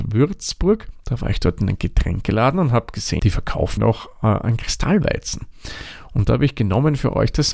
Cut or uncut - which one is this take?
cut